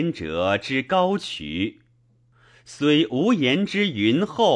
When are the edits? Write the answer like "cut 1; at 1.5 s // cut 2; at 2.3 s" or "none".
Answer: none

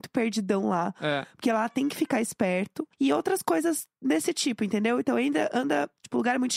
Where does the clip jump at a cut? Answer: cut 1; at 2.9 s

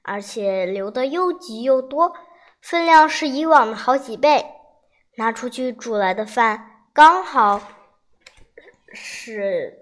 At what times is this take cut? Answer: none

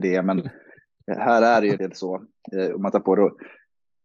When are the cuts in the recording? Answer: cut 1; at 1.8 s // cut 2; at 2.9 s

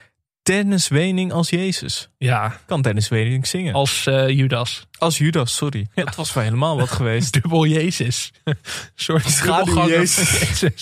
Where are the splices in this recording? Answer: cut 1; at 4.9 s

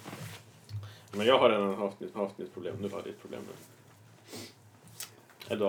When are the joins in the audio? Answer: cut 1; at 2.1 s // cut 2; at 2.9 s

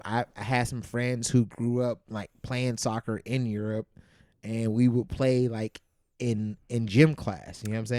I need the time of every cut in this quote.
none

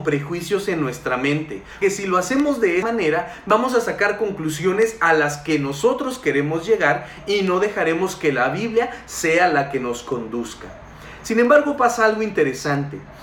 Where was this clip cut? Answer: cut 1; at 1.8 s // cut 2; at 2.8 s

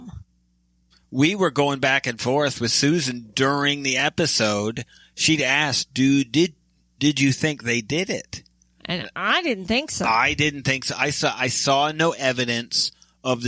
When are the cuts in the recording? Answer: none

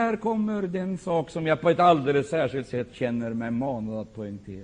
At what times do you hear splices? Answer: none

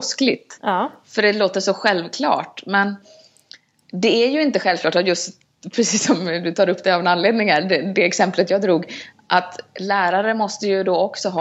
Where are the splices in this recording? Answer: none

